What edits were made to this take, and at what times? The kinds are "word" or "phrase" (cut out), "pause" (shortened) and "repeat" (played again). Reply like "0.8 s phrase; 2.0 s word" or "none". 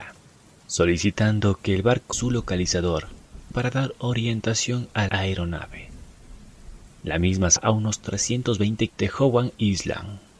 2.1 s word; 3.5 s word; 5.1 s word; 7.6 s word; 8.9 s word